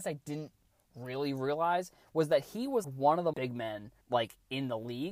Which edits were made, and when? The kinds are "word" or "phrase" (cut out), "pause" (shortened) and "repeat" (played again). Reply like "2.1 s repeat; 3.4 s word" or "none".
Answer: 2.8 s word; 3.3 s phrase; 4.0 s pause